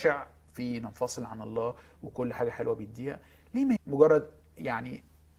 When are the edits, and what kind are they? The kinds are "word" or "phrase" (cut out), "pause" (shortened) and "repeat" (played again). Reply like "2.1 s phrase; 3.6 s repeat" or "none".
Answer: 3.8 s word